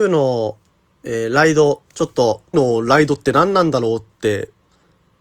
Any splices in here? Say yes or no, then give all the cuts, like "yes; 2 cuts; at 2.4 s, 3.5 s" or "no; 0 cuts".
yes; 2 cuts; at 1.9 s, 2.5 s